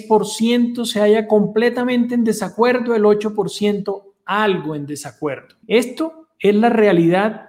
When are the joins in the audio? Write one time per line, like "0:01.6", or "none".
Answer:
0:05.6